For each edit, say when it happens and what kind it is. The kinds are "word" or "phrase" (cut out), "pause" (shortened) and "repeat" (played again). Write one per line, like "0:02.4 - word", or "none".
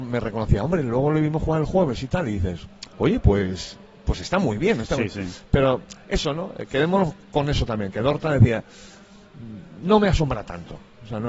0:02.9 - pause